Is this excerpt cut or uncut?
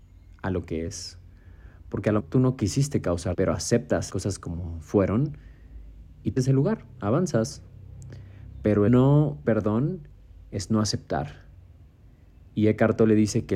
cut